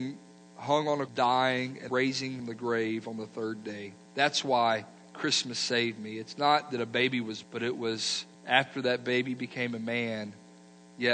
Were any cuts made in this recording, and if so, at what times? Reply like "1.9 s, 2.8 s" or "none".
1.1 s, 1.9 s, 2.4 s, 4.1 s, 7.4 s, 8.3 s